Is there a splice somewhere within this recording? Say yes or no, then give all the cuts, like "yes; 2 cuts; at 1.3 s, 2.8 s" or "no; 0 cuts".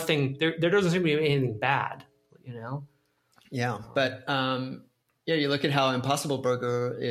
no; 0 cuts